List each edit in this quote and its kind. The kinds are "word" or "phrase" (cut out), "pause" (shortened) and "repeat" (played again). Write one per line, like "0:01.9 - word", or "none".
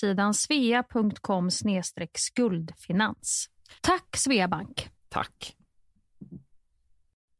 0:03.8 - pause
0:05.0 - pause